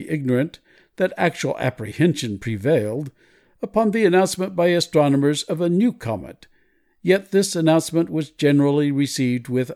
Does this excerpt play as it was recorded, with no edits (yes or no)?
yes